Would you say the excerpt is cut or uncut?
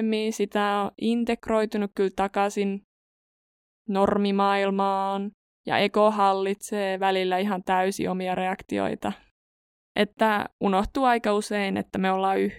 uncut